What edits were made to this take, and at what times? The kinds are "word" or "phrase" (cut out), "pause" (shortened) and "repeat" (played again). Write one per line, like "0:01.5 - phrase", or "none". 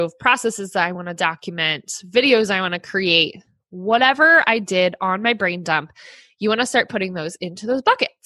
none